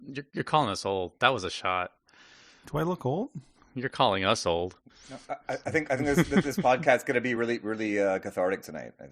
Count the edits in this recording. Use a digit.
0